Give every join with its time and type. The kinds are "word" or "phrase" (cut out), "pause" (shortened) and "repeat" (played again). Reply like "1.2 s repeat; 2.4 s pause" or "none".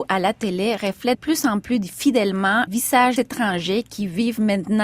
1.1 s word; 2.7 s word; 3.2 s word

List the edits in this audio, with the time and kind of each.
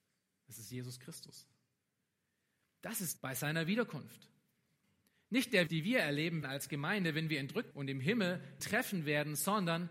3.2 s word; 5.7 s word; 6.4 s word; 7.7 s word; 8.6 s word

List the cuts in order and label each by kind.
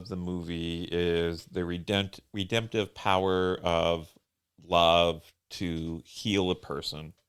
none

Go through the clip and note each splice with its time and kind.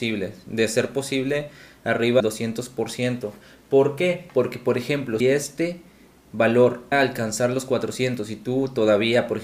2.2 s word; 5.2 s word; 6.9 s word

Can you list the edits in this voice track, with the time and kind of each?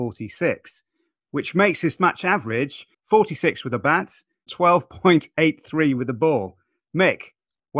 2.0 s word; 2.9 s pause; 4.5 s word

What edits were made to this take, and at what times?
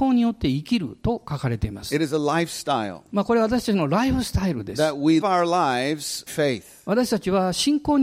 5.2 s word; 6.3 s word

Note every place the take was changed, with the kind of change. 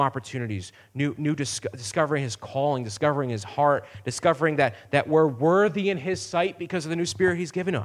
none

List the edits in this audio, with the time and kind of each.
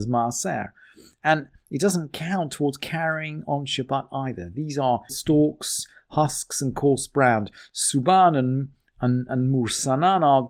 5.1 s phrase

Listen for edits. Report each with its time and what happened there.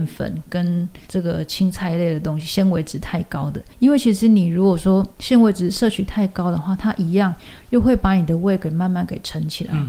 1.0 s pause; 3.7 s pause; 5.1 s pause

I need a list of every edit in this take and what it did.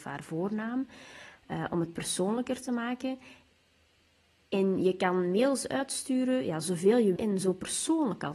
7.2 s word

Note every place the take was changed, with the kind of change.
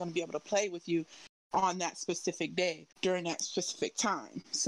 2.9 s pause

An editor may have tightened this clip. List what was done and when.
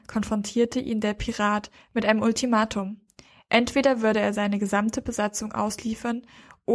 none

